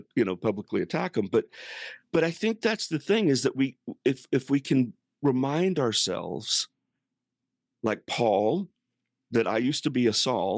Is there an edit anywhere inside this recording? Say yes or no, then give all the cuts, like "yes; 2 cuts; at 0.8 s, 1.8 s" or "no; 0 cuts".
no; 0 cuts